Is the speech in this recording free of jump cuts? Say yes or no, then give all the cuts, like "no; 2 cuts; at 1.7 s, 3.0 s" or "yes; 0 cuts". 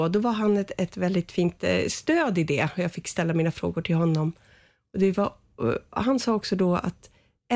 yes; 0 cuts